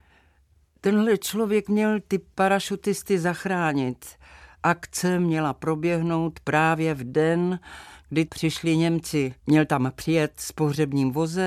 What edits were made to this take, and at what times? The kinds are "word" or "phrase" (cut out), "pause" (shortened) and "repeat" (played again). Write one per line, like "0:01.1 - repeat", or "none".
0:08.3 - word
0:09.4 - pause